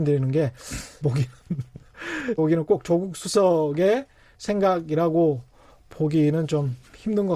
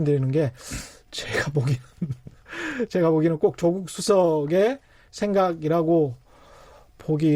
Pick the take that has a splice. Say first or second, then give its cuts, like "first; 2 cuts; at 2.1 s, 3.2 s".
first; 3 cuts; at 1.0 s, 2.4 s, 5.7 s